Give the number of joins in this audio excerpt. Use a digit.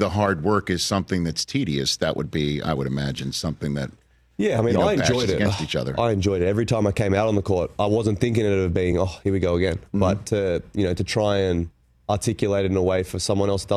0